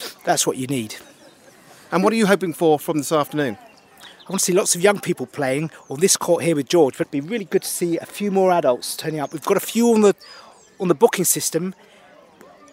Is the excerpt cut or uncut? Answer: cut